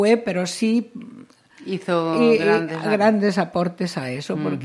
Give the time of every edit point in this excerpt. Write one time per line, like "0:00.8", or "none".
none

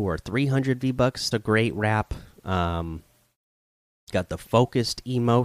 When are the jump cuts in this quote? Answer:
0:01.3
0:04.1

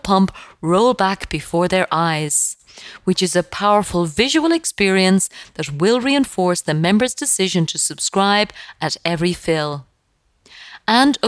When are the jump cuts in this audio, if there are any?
none

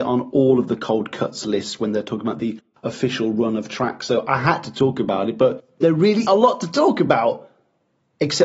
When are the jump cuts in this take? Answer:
0:06.3

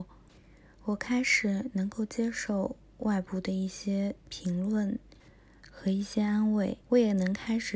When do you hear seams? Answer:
0:06.8

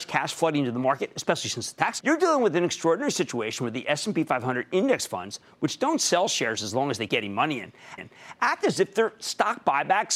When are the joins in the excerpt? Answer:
0:02.0
0:07.1
0:08.0

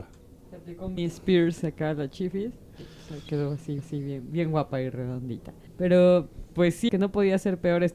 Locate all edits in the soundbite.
0:01.0
0:03.8
0:05.7
0:06.9

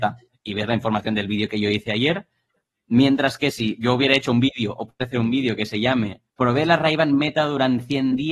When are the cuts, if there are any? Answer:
0:06.3

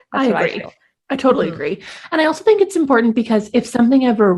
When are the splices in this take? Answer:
none

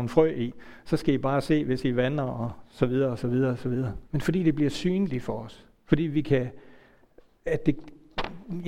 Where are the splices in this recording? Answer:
0:04.1

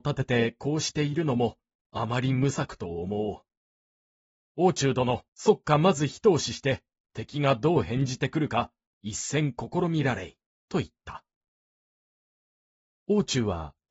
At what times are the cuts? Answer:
0:05.3
0:10.5

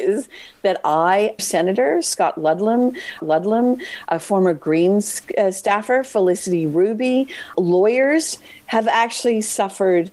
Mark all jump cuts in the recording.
0:01.4
0:03.2
0:07.5

